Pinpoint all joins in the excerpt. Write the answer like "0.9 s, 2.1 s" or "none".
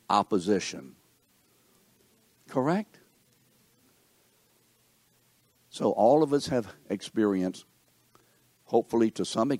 none